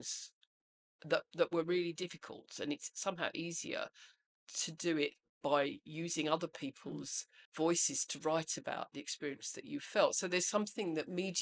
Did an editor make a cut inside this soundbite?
yes; 1 cut; at 7.4 s

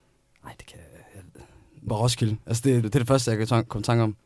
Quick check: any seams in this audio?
yes; 2 cuts; at 1.9 s, 2.8 s

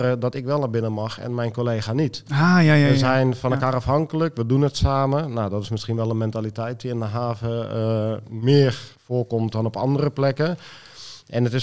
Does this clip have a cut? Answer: yes; 1 cut; at 8.9 s

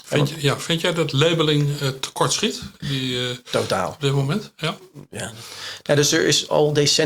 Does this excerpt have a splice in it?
no; 0 cuts

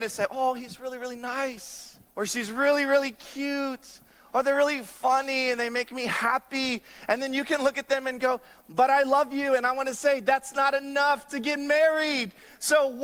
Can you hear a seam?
yes; 1 cut; at 2.1 s

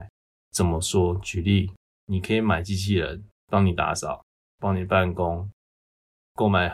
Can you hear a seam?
yes; 2 cuts; at 1.8 s, 3.3 s

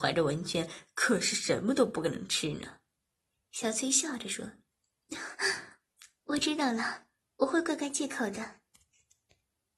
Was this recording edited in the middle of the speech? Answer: no; 0 cuts

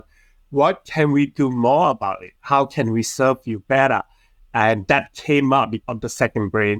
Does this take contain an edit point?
yes; 2 cuts; at 2.4 s, 5.8 s

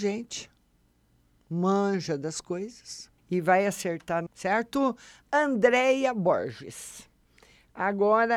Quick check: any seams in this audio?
yes; 2 cuts; at 3.2 s, 4.3 s

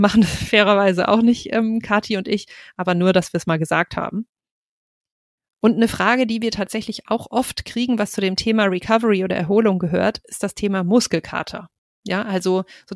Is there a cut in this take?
no; 0 cuts

